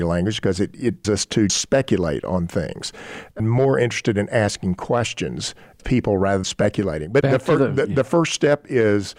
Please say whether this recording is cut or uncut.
cut